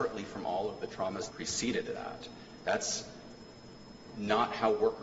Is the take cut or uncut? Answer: cut